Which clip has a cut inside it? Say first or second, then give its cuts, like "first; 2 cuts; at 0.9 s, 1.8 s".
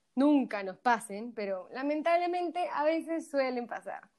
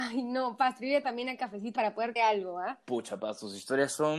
second; 4 cuts; at 1.0 s, 1.4 s, 1.8 s, 2.2 s